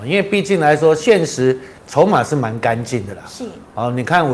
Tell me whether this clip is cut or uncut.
cut